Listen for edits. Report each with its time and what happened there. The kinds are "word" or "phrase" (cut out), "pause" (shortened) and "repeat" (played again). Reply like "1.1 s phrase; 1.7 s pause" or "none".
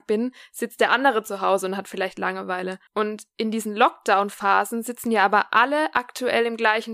2.9 s pause